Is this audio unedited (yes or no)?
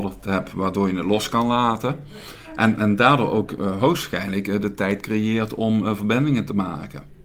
yes